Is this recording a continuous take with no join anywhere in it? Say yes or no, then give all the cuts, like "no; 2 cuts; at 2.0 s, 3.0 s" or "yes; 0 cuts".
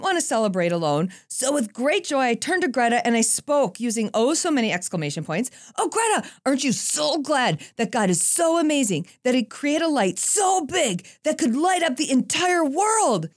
yes; 0 cuts